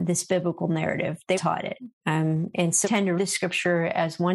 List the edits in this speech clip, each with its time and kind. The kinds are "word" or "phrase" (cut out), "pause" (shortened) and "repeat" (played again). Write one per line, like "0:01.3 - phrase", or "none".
0:01.3 - word
0:01.9 - pause
0:02.8 - word
0:03.2 - word